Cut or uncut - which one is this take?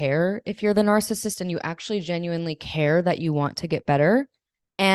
uncut